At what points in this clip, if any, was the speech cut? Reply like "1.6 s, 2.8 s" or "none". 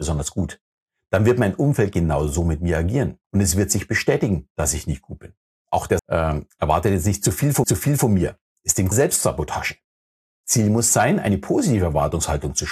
3.2 s, 6.0 s, 7.6 s, 8.9 s